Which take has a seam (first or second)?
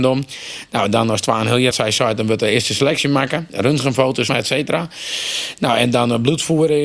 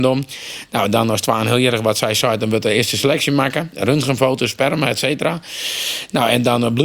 first